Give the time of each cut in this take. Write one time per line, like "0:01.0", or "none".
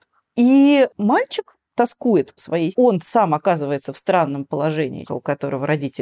0:02.4
0:02.7
0:05.1